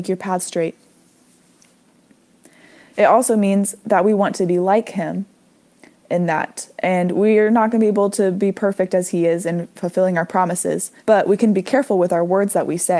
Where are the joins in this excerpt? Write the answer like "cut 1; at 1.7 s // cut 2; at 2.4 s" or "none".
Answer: cut 1; at 11.0 s